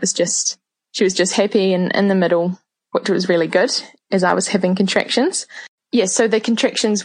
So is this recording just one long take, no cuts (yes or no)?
yes